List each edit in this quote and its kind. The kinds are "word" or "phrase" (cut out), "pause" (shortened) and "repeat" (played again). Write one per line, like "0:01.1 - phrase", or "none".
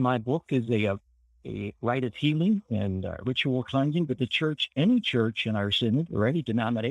none